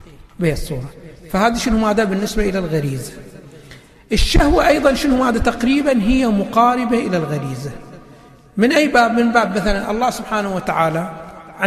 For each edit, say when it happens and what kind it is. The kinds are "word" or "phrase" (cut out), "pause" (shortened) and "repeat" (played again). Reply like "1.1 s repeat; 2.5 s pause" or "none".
none